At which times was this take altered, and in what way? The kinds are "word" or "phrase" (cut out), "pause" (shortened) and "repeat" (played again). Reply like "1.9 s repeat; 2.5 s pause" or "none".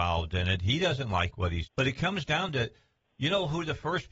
1.7 s word